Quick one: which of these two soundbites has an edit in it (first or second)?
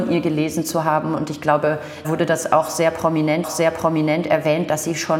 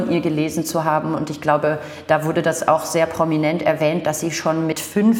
first